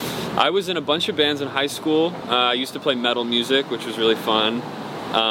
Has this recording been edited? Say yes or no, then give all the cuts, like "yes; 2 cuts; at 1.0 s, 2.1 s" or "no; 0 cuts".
no; 0 cuts